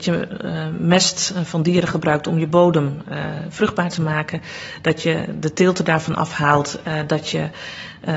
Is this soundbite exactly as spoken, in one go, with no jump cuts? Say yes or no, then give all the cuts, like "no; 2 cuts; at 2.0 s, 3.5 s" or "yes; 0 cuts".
yes; 0 cuts